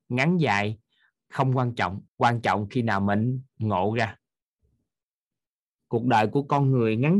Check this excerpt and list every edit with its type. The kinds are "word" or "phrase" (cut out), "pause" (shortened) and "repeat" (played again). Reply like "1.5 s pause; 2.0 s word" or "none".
2.1 s pause; 3.5 s pause